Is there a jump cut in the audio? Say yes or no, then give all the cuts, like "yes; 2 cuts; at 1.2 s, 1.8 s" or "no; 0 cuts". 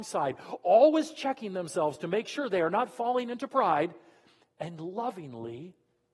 no; 0 cuts